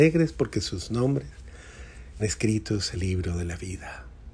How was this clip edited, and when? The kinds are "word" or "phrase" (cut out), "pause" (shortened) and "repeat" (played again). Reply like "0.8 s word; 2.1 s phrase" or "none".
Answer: 2.2 s word; 2.9 s word